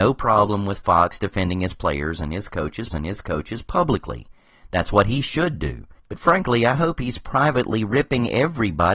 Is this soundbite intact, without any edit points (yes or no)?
no